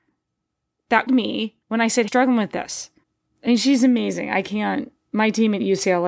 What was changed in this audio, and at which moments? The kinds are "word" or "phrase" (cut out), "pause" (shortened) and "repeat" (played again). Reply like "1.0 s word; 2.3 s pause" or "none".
1.1 s word; 1.6 s pause; 2.1 s phrase; 3.0 s pause